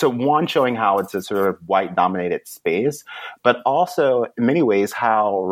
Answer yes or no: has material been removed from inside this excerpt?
no